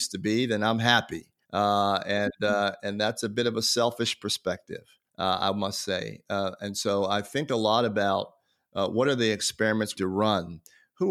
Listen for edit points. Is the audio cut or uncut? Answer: cut